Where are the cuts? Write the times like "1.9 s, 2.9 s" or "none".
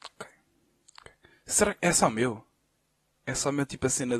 none

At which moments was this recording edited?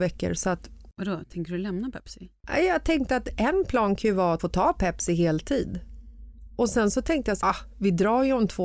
4.4 s, 7.4 s

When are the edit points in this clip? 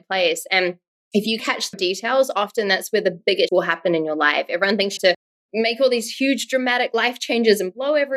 1.4 s, 1.7 s, 3.5 s, 5.0 s

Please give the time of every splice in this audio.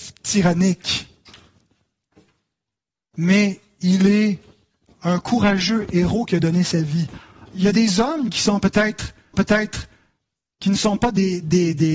9.3 s

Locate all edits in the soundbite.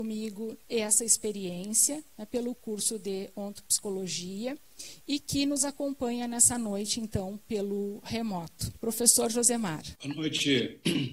8.8 s, 9.9 s

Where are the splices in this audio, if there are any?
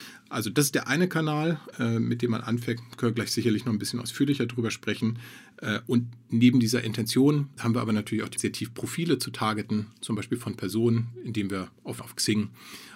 1.7 s, 7.6 s, 8.4 s, 12.0 s

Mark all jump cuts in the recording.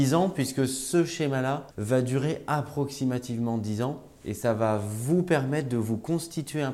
1.7 s

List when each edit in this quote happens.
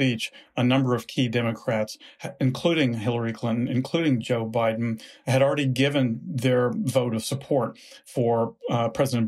none

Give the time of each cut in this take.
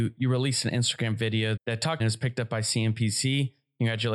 1.6 s, 2.0 s

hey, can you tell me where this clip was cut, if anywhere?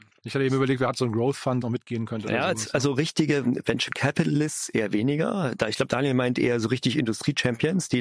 1.6 s

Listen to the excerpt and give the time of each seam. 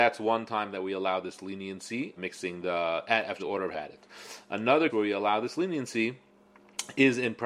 2.2 s, 3.4 s, 3.7 s, 4.9 s

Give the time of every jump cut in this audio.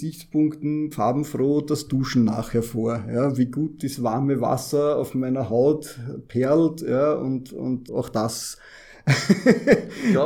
0.9 s, 7.9 s

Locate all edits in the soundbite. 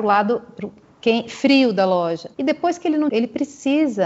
2.3 s, 3.1 s

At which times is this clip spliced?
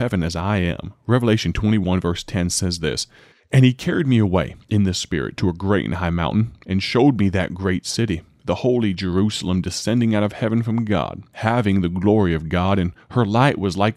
3.3 s

